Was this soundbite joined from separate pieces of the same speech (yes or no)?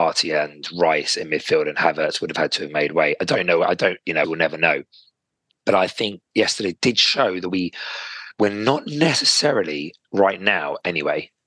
yes